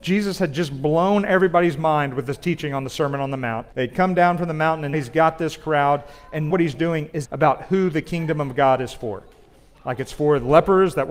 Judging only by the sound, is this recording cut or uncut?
cut